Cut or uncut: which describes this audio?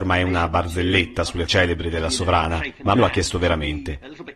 cut